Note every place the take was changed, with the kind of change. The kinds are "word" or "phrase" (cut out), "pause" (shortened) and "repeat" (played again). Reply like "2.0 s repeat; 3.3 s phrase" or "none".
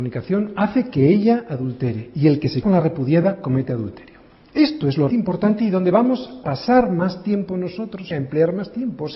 2.6 s word; 5.1 s word; 6.4 s word; 8.1 s word